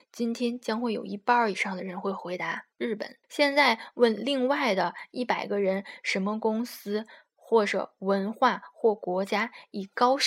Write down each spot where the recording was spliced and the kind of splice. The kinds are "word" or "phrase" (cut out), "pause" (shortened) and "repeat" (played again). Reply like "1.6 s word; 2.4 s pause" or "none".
2.7 s pause; 3.2 s pause